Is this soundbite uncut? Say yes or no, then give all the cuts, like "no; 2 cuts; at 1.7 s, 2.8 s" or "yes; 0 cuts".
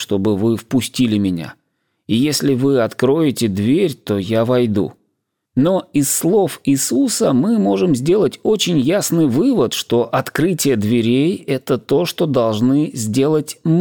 yes; 0 cuts